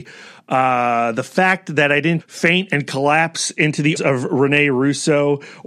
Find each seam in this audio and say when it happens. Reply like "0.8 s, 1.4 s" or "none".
2.2 s, 4.0 s